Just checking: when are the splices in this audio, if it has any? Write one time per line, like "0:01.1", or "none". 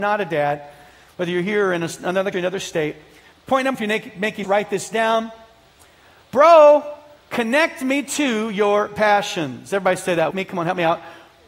0:02.3
0:03.7
0:04.4
0:10.3